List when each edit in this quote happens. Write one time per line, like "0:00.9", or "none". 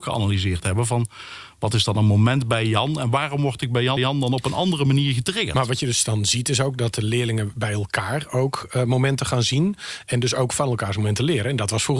0:04.0